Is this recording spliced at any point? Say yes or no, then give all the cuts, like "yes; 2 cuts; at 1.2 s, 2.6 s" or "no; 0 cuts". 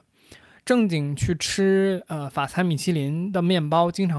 no; 0 cuts